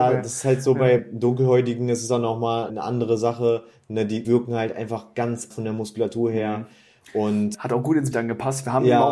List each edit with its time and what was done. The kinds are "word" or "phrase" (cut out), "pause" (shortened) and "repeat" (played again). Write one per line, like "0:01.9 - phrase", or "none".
0:01.0 - word
0:02.7 - word
0:04.2 - word
0:05.5 - word
0:07.5 - word
0:08.1 - word